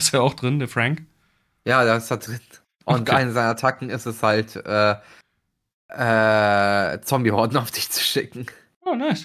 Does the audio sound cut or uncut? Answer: uncut